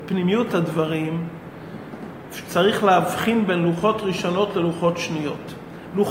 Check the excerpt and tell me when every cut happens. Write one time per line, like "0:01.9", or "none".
none